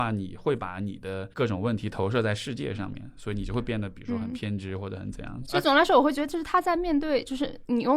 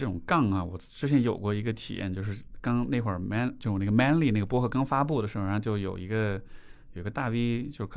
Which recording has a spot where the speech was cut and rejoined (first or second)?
first